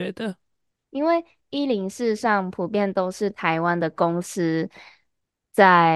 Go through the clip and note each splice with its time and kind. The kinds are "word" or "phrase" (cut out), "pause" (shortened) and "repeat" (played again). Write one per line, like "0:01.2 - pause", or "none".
none